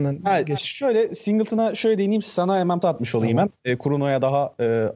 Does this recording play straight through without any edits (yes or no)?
no